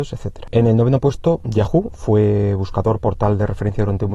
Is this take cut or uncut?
uncut